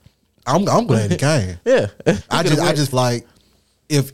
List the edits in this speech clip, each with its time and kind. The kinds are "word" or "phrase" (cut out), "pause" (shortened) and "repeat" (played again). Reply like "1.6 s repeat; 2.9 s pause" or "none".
2.2 s word; 2.9 s word